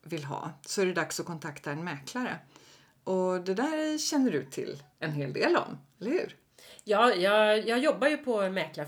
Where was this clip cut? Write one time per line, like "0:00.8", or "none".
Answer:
0:04.9